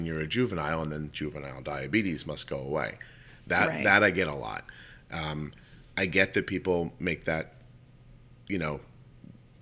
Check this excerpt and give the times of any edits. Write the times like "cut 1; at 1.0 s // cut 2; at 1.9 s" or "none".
none